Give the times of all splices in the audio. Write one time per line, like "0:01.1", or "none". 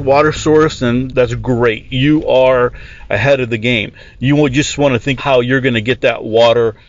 0:01.1
0:05.2

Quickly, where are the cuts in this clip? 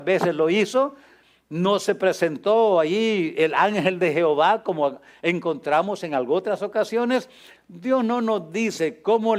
none

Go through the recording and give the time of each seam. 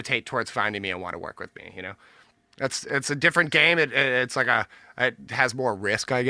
none

